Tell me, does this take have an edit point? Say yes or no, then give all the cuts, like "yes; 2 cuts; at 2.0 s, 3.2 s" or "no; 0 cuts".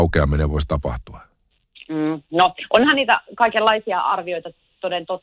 no; 0 cuts